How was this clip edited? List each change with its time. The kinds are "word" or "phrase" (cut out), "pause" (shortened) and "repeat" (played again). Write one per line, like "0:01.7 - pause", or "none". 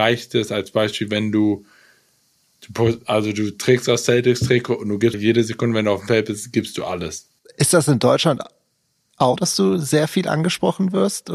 0:05.1 - word
0:07.4 - pause
0:09.4 - word